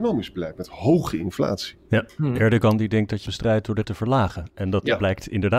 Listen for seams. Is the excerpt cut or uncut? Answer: cut